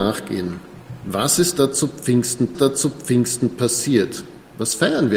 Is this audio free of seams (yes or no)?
no